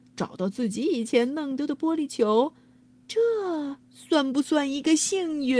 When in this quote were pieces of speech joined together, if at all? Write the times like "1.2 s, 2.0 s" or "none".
3.8 s